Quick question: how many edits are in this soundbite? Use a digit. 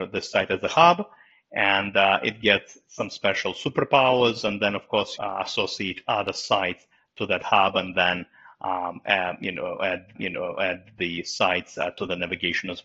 2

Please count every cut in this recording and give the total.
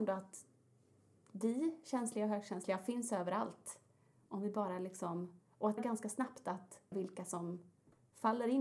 2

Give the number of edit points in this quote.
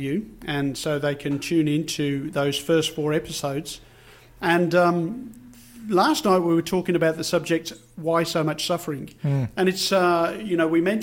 0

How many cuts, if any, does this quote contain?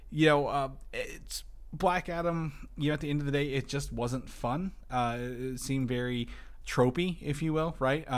1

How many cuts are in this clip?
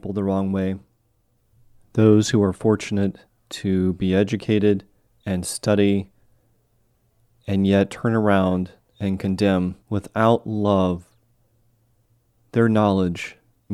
3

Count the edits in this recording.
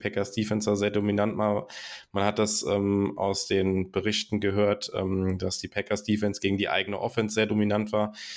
0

